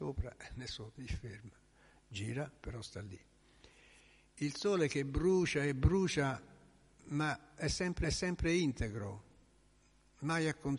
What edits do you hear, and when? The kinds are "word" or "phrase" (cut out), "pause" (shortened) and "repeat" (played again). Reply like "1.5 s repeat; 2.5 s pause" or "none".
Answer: 1.0 s word; 8.0 s repeat

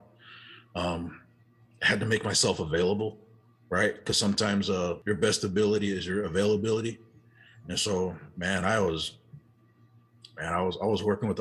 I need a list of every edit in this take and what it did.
none

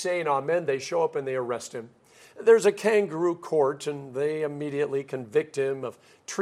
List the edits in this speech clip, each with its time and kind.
none

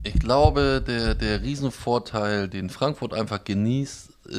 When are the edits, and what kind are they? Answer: 2.5 s word

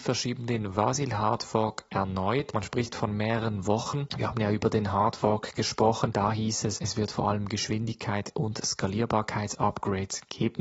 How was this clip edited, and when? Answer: none

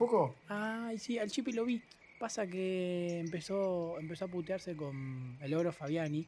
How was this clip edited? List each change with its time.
none

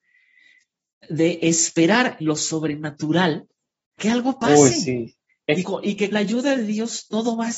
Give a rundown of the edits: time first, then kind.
2.2 s word; 4.0 s word; 5.3 s pause; 5.6 s word; 6.1 s word

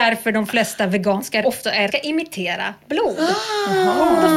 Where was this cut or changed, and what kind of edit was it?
1.4 s word; 1.9 s phrase

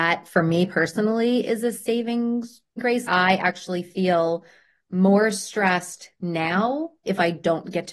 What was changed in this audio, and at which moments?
none

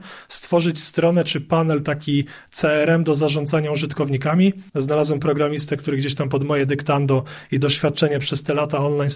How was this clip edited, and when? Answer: 4.7 s pause

